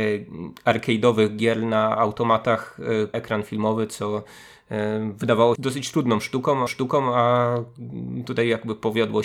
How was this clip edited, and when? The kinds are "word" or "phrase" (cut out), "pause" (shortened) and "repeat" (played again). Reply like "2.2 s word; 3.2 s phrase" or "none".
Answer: 3.1 s phrase; 5.5 s word; 6.7 s repeat